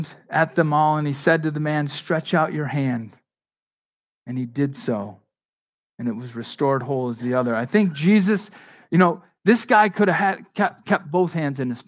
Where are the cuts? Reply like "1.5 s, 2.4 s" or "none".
none